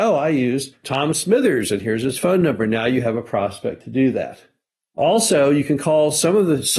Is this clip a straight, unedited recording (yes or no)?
yes